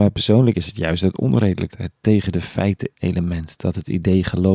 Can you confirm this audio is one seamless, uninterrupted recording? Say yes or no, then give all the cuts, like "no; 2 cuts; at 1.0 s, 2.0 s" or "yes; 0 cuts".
no; 2 cuts; at 1.7 s, 2.9 s